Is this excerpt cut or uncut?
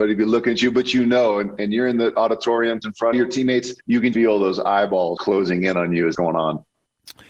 cut